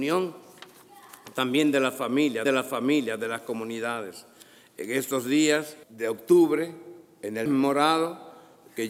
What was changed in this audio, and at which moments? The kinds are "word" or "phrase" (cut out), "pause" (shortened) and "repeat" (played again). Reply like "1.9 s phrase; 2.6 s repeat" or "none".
2.5 s repeat; 5.8 s pause; 7.5 s word